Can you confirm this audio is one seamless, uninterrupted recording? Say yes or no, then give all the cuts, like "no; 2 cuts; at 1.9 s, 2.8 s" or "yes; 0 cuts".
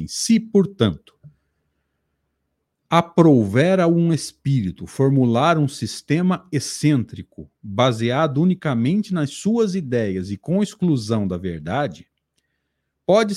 yes; 0 cuts